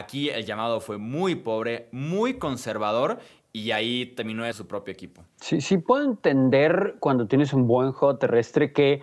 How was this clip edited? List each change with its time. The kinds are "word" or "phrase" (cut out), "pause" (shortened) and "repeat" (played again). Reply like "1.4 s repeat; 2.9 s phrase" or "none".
4.5 s phrase; 5.3 s pause